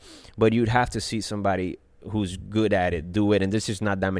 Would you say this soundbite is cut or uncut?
uncut